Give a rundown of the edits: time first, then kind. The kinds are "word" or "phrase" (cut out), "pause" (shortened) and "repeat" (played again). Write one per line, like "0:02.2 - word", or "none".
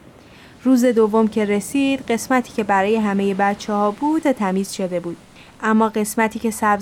0:04.2 - word
0:05.4 - pause